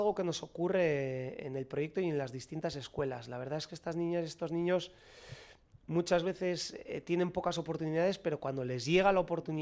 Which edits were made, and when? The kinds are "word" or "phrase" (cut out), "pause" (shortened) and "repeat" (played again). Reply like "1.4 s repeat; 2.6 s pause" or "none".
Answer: none

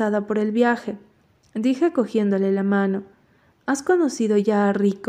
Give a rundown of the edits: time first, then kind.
none

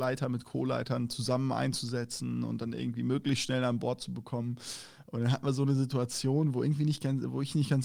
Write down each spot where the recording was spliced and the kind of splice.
none

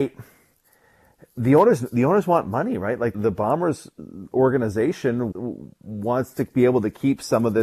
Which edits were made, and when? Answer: 3.1 s word; 5.3 s word

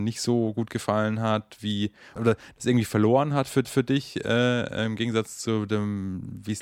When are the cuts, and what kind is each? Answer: 2.2 s word; 3.6 s repeat

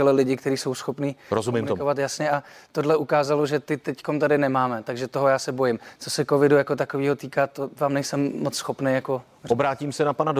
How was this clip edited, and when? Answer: none

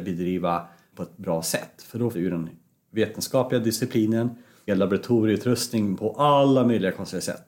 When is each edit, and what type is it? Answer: 0.9 s word; 2.1 s word; 4.7 s word

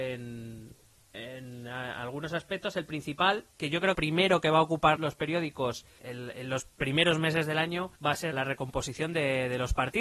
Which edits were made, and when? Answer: 3.5 s pause; 3.9 s phrase; 5.0 s word; 6.0 s word; 8.0 s pause; 8.3 s word

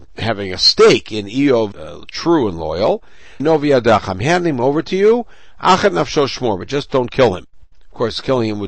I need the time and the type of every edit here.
1.7 s word; 3.4 s phrase

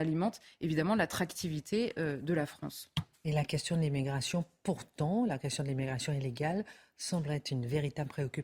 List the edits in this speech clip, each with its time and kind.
none

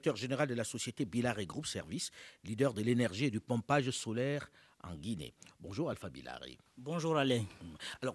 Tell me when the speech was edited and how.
none

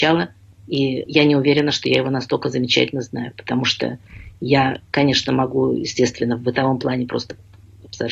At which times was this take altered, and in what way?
none

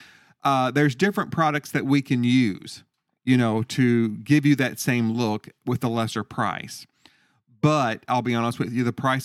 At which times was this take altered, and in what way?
none

